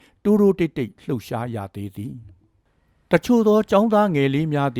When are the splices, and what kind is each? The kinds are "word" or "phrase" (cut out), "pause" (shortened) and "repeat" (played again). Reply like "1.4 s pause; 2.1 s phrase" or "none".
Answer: none